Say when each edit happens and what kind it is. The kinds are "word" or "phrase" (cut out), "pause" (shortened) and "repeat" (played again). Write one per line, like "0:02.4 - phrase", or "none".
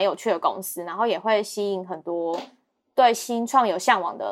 none